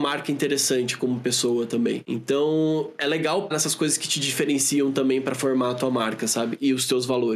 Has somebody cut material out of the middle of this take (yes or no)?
yes